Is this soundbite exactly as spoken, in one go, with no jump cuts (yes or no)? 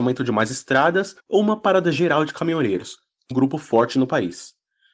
no